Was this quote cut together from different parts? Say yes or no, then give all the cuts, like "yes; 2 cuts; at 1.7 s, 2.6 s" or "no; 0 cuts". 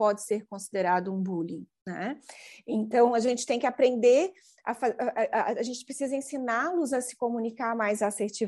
no; 0 cuts